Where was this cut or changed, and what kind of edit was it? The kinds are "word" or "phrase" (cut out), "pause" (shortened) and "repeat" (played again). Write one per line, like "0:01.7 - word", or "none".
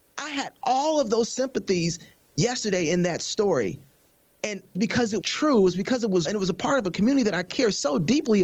0:04.7 - phrase
0:05.2 - word
0:06.2 - word